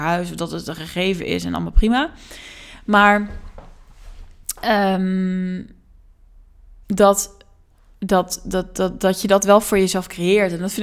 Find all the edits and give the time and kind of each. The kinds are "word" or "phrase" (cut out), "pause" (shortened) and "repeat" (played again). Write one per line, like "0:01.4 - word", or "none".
none